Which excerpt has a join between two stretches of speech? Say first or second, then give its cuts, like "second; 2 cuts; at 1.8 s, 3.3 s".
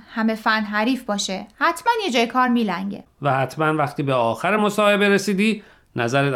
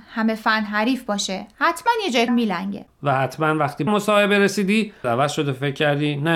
second; 3 cuts; at 2.3 s, 3.9 s, 5.0 s